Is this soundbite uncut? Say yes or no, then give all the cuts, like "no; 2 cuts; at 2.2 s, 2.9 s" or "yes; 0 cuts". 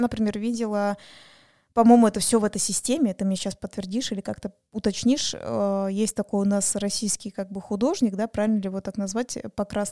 yes; 0 cuts